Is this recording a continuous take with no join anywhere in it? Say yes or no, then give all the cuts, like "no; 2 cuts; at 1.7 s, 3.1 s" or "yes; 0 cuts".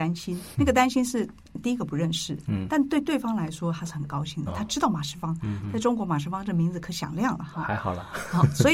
no; 1 cut; at 4.5 s